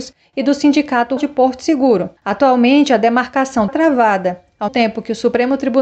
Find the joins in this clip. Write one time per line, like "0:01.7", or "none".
0:01.2
0:02.2
0:03.7
0:04.7

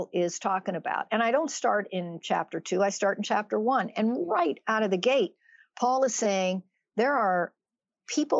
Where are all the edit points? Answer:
none

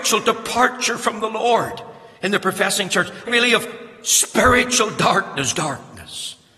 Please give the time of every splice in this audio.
0:02.1
0:03.3
0:05.5

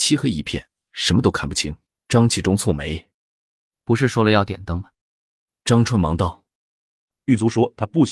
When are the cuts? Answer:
0:01.9
0:03.1
0:04.9
0:06.5

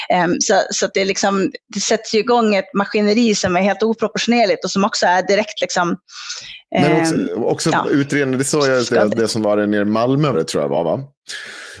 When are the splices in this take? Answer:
0:10.3

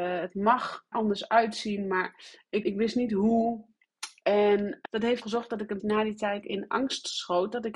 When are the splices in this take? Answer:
0:00.9
0:02.6
0:04.8
0:05.2
0:05.8
0:06.4

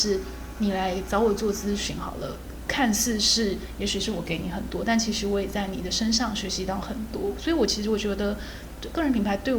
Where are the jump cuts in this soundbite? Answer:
0:02.7

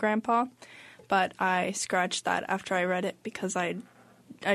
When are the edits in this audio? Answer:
none

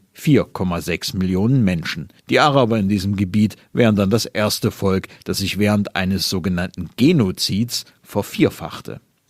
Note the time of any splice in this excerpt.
0:02.2

